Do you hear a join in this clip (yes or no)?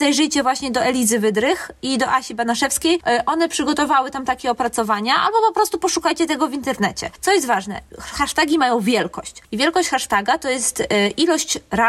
no